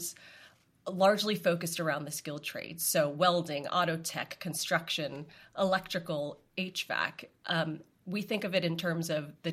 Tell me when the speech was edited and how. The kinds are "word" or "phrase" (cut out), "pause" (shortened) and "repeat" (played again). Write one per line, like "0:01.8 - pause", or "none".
none